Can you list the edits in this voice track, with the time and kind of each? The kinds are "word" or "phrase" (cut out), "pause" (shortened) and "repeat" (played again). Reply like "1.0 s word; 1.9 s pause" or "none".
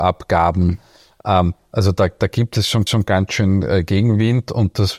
2.9 s repeat